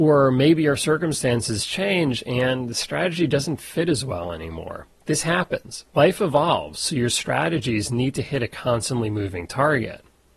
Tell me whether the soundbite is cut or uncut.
cut